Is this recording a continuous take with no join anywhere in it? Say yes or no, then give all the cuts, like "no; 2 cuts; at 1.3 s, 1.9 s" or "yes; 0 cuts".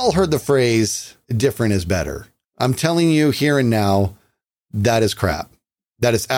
no; 2 cuts; at 1.2 s, 2.4 s